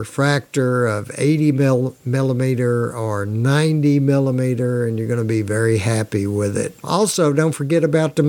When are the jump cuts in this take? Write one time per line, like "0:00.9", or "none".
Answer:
0:06.8